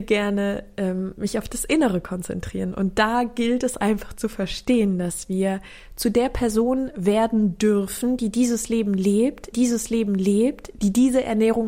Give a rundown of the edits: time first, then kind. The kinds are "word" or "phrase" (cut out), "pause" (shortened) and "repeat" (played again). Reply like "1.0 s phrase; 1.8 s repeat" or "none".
9.5 s repeat

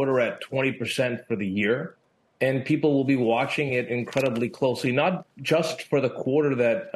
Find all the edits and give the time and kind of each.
none

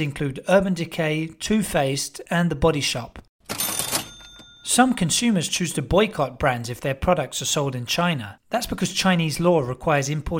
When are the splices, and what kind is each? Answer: none

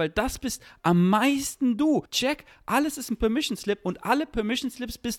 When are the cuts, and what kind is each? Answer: 2.1 s pause

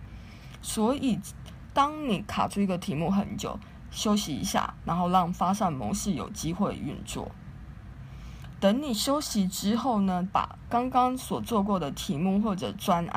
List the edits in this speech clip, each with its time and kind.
10.3 s phrase

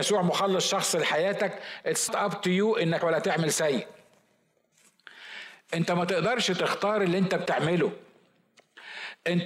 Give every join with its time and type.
2.1 s word; 3.0 s phrase

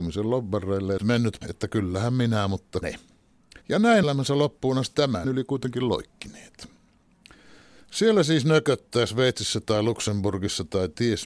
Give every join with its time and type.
1.0 s phrase; 1.4 s word; 2.8 s word; 3.6 s pause; 4.0 s phrase; 4.9 s word; 5.2 s word

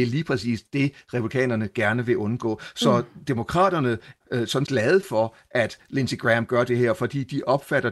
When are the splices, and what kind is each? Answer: 4.2 s word; 4.6 s word

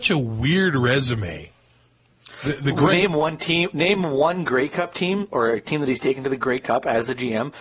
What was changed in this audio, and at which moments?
none

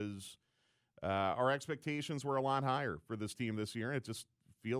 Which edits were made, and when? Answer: none

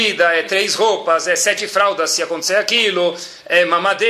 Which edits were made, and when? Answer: none

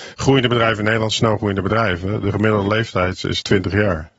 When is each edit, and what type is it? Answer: none

